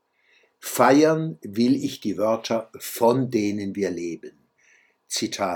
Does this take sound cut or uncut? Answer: uncut